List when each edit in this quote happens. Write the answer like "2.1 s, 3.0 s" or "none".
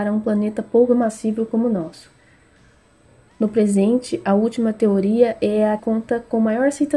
5.8 s